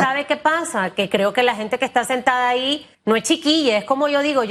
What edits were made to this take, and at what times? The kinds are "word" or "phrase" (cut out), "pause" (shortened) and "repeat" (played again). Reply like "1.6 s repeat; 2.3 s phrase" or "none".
2.9 s pause